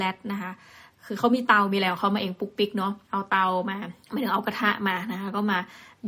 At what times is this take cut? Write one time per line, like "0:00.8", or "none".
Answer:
0:03.0
0:04.0